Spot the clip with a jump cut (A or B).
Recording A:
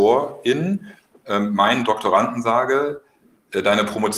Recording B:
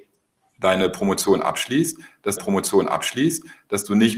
B